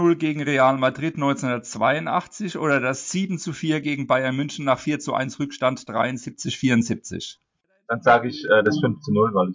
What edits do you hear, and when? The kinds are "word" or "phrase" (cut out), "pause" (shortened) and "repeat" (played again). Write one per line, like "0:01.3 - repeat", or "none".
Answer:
none